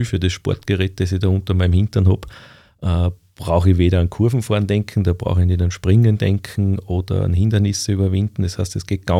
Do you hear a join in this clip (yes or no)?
no